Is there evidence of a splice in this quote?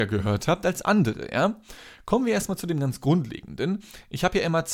no; 0 cuts

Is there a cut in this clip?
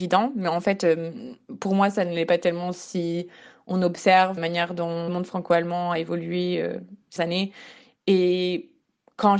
yes; 3 cuts; at 4.4 s, 5.1 s, 7.2 s

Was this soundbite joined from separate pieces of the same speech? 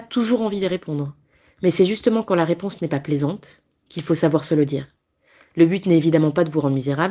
no; 0 cuts

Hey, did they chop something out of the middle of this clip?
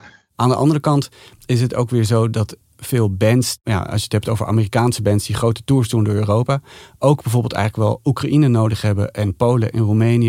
no; 0 cuts

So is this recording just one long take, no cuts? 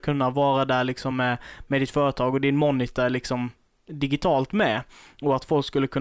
yes; 0 cuts

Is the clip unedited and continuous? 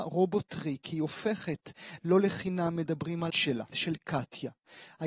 no; 3 cuts; at 2.0 s, 3.3 s, 3.7 s

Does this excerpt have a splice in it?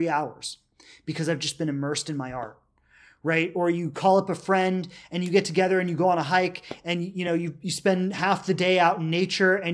no; 0 cuts

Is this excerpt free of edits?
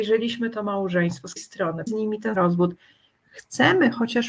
no; 3 cuts; at 1.4 s, 1.9 s, 2.3 s

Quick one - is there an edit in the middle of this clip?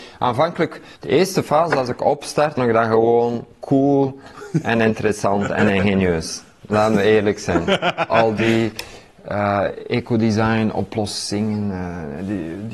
yes; 1 cut; at 2.6 s

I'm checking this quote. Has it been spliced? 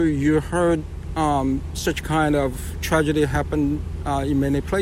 no; 0 cuts

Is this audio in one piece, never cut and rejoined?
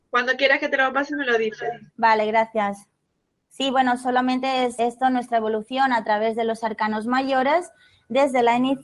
no; 2 cuts; at 1.9 s, 4.8 s

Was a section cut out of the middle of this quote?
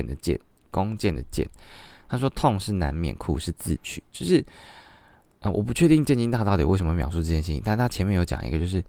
no; 0 cuts

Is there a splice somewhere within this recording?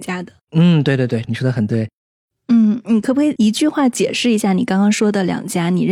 no; 0 cuts

